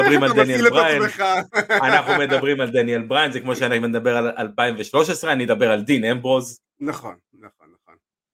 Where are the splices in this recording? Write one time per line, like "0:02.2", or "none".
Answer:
0:06.7